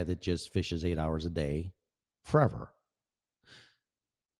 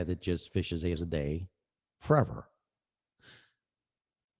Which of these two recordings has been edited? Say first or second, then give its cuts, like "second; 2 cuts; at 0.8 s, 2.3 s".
second; 1 cut; at 1.0 s